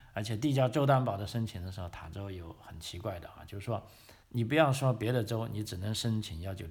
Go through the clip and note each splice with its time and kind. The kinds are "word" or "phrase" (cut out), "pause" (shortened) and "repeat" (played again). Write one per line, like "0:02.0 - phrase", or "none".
0:04.2 - pause